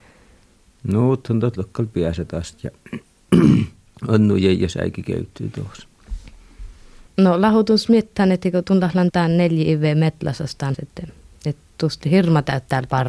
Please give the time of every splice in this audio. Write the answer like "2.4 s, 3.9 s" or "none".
1.6 s, 3.9 s, 7.1 s, 9.1 s, 10.7 s